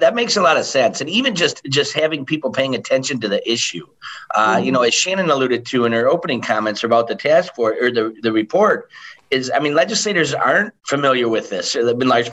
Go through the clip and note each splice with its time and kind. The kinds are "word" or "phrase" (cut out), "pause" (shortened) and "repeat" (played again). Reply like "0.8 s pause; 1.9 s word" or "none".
10.8 s pause